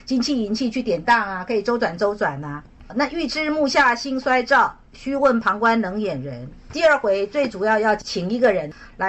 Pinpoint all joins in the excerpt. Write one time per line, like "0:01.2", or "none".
0:06.6